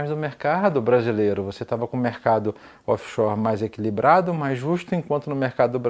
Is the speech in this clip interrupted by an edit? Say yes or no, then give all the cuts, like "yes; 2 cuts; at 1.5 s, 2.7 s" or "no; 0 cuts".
no; 0 cuts